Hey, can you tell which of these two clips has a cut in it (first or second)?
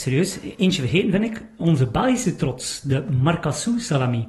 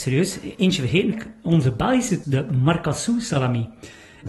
second